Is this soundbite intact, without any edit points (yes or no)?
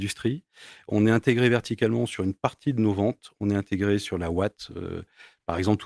yes